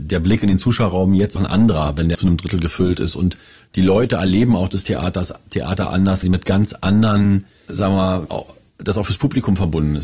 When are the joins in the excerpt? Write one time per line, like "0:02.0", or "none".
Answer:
0:01.4
0:02.1
0:06.2
0:07.7
0:08.3